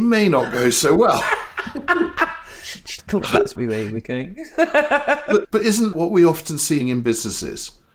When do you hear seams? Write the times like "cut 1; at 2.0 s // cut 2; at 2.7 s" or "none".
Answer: cut 1; at 3.0 s // cut 2; at 3.6 s // cut 3; at 5.4 s // cut 4; at 5.9 s // cut 5; at 6.8 s